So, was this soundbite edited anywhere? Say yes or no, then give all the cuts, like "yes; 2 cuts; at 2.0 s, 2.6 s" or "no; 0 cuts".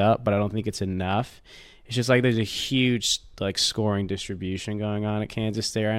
no; 0 cuts